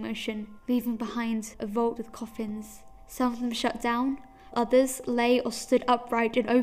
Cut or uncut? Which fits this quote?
cut